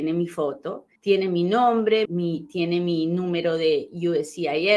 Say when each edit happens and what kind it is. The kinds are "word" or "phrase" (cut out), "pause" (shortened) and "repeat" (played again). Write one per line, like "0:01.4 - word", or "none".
0:01.0 - pause
0:02.0 - word